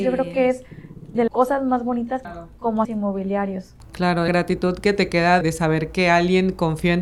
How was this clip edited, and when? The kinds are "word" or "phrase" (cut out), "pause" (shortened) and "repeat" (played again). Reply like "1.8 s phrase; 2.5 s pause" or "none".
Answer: 1.3 s word; 2.2 s phrase; 2.8 s word; 4.3 s word; 5.4 s word